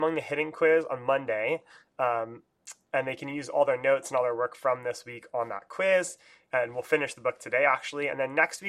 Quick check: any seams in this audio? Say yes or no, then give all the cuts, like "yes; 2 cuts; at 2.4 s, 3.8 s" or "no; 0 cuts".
no; 0 cuts